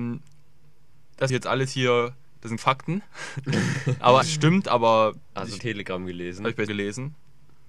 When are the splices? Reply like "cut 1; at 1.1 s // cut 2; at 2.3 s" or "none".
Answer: cut 1; at 1.3 s // cut 2; at 2.6 s // cut 3; at 4.2 s // cut 4; at 5.6 s // cut 5; at 6.7 s